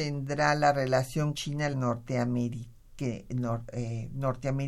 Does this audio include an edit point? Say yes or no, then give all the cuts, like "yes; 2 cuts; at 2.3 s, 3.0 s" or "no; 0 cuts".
yes; 2 cuts; at 1.3 s, 1.7 s